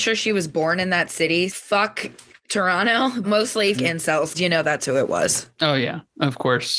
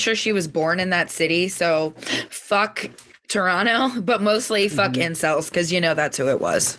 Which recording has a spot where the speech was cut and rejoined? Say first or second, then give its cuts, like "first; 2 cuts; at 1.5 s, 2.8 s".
first; 4 cuts; at 1.5 s, 3.2 s, 3.7 s, 4.3 s